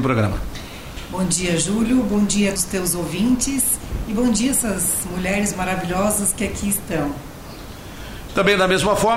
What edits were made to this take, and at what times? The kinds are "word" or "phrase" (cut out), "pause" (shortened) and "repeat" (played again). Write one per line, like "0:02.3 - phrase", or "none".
0:02.6 - word

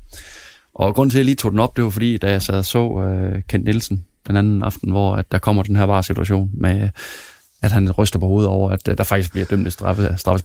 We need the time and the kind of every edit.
none

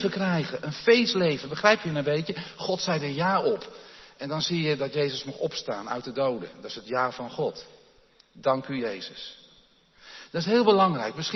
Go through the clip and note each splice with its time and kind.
none

